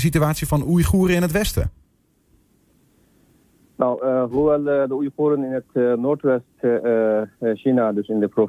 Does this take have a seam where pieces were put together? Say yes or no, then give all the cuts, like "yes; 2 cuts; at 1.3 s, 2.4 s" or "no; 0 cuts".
no; 0 cuts